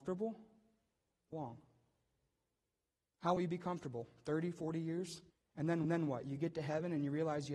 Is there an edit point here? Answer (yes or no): yes